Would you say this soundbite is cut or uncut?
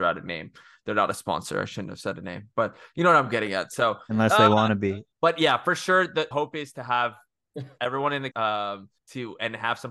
cut